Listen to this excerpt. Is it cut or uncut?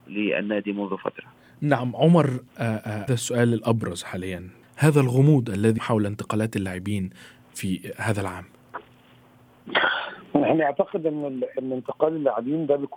cut